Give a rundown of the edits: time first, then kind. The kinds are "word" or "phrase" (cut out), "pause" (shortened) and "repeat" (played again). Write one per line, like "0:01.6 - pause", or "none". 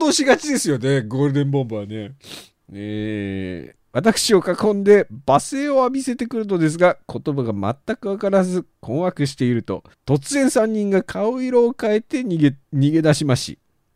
0:03.8 - pause
0:08.7 - pause
0:09.9 - pause